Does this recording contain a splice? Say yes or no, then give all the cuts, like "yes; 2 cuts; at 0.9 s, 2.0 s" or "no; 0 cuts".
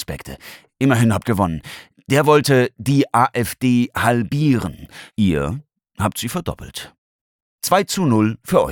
yes; 2 cuts; at 1.2 s, 5.1 s